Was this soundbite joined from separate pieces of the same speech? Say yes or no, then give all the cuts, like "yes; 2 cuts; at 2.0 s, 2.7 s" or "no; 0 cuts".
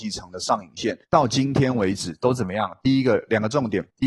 yes; 1 cut; at 1.0 s